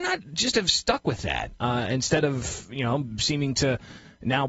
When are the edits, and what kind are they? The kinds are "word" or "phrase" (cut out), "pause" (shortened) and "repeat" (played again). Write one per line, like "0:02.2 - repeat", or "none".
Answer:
none